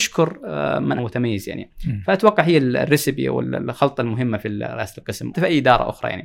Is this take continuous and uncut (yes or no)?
no